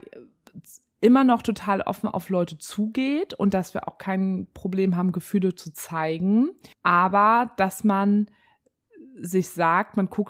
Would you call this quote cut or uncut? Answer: cut